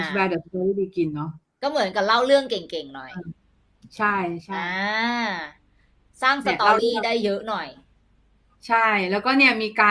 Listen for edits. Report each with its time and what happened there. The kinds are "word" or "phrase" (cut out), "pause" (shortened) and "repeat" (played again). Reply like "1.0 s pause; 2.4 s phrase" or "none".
none